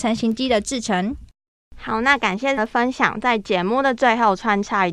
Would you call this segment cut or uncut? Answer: cut